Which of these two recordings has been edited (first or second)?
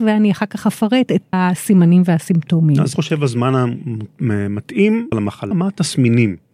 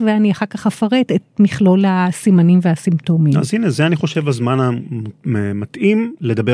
first